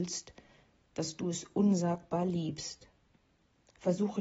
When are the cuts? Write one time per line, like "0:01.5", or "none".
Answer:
none